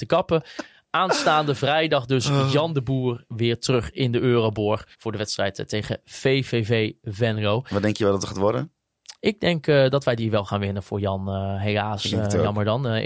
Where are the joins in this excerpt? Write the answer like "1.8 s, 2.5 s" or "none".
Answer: 4.9 s